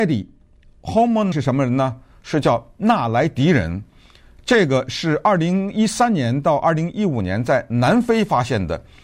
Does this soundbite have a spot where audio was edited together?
yes; 1 cut; at 1.3 s

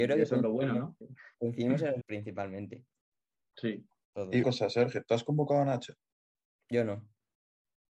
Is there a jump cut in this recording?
yes; 3 cuts; at 1.0 s, 2.0 s, 4.4 s

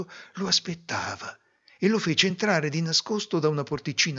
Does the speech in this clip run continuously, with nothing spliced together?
yes; 0 cuts

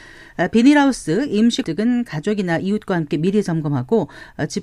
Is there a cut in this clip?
yes; 1 cut; at 1.6 s

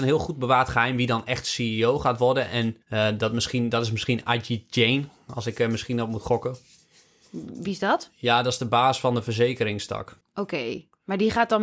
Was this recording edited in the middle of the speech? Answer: yes; 2 cuts; at 2.8 s, 10.2 s

